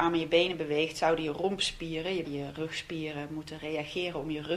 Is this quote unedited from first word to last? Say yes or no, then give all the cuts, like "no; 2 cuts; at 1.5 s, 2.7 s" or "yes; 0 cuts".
no; 1 cut; at 2.2 s